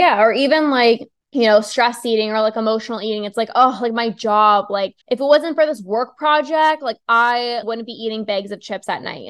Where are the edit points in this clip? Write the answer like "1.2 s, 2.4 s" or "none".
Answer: 1.2 s, 5.0 s, 7.6 s